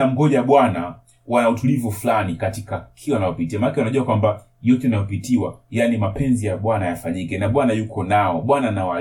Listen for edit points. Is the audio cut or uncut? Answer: uncut